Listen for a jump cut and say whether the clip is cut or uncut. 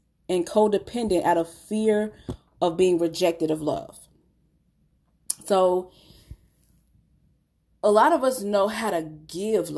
uncut